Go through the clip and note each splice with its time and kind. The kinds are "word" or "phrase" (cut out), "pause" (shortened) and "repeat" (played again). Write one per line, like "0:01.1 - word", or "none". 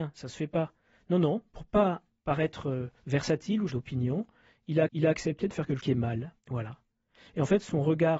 0:03.0 - pause
0:03.7 - word
0:04.9 - repeat
0:05.8 - word
0:06.4 - pause